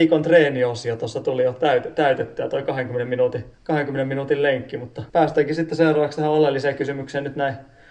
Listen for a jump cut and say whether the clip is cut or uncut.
cut